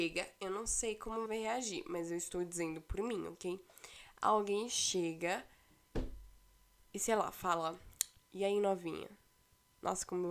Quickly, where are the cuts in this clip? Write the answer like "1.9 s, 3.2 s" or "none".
1.3 s